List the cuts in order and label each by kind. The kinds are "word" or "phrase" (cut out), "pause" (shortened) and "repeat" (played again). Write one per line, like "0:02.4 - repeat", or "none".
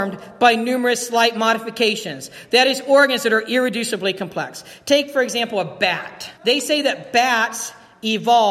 0:06.4 - pause